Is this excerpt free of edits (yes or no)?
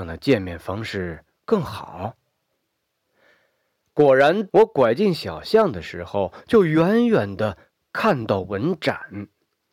no